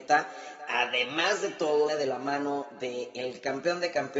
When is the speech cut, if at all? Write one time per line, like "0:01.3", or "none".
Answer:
0:01.9